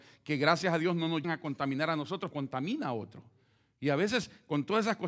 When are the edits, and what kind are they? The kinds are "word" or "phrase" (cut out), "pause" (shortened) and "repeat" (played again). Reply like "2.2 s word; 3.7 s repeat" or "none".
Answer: 1.2 s word; 2.3 s word